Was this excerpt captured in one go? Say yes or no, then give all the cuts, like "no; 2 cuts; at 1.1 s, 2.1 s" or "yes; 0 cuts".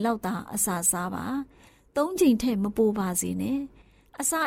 yes; 0 cuts